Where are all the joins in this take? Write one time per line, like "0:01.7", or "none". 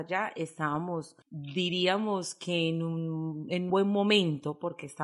0:01.2
0:03.7